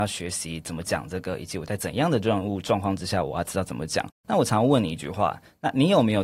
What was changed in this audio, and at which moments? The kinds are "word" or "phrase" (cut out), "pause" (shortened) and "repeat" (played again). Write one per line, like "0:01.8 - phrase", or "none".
0:04.2 - pause